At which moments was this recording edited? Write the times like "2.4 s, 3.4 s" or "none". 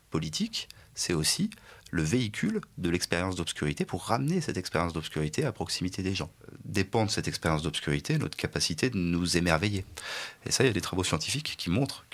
1.8 s